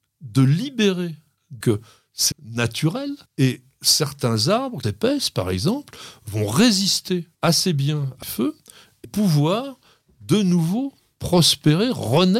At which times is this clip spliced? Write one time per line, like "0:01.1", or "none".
0:01.6
0:02.3
0:03.3
0:04.8
0:07.3
0:08.2
0:09.0